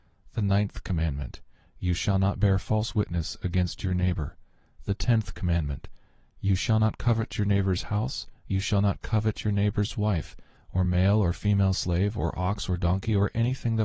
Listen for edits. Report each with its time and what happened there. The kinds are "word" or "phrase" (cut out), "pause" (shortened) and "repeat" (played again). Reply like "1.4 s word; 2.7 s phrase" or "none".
none